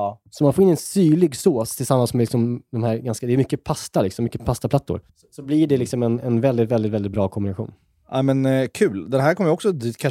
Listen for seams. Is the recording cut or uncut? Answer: cut